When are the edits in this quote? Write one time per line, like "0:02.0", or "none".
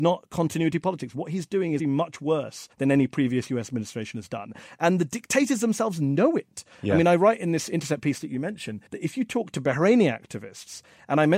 0:01.8
0:02.7
0:08.9